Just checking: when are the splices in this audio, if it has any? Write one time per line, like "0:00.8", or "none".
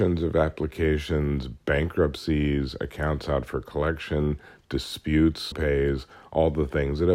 0:01.6
0:05.5